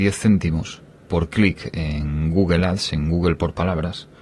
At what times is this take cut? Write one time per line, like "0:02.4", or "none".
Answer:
none